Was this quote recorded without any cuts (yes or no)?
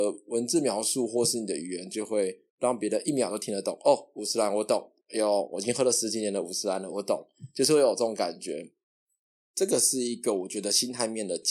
no